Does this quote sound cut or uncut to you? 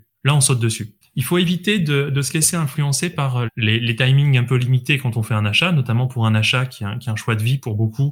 cut